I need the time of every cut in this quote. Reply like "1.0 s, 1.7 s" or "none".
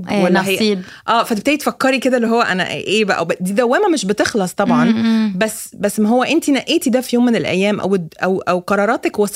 none

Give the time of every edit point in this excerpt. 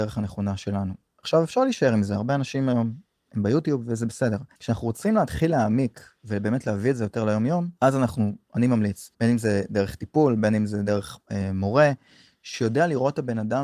4.5 s, 7.8 s, 9.1 s

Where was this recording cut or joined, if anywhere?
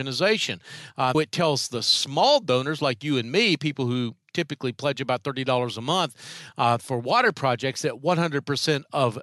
1.1 s

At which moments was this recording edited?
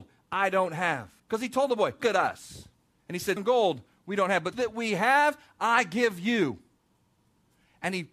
1.2 s, 2.0 s, 2.9 s, 3.4 s, 4.5 s

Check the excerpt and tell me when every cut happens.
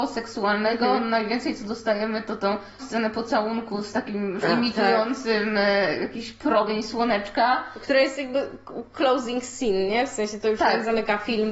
2.8 s, 3.9 s, 4.4 s

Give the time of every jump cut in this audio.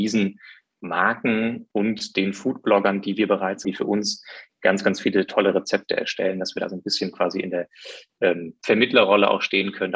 3.6 s

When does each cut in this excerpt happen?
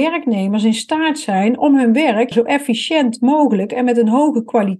2.3 s

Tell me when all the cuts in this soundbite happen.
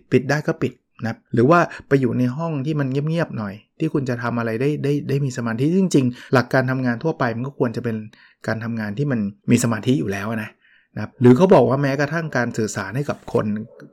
1.3 s, 6.3 s, 9.4 s, 11.1 s

